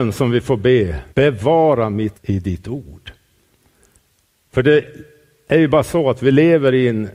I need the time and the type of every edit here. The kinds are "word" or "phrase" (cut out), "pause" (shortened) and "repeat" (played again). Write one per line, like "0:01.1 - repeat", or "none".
0:01.1 - pause
0:02.1 - word